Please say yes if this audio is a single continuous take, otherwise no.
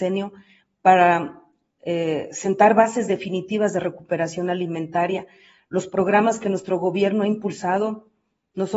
yes